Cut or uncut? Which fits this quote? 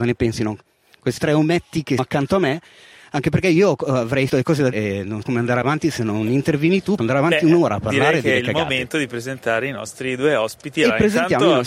cut